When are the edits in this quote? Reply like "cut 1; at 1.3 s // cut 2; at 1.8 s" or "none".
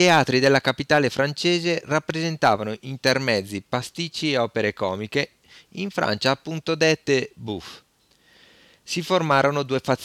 none